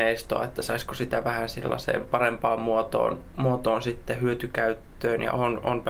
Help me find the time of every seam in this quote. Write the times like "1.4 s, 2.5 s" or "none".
none